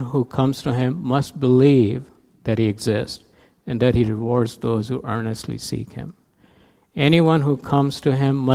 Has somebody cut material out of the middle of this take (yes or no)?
no